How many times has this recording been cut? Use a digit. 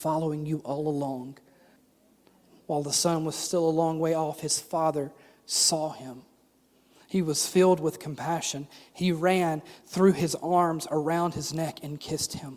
1